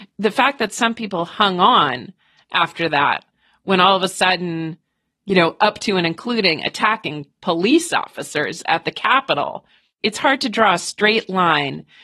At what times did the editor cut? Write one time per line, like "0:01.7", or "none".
none